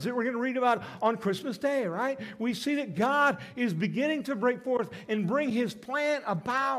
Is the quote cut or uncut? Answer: uncut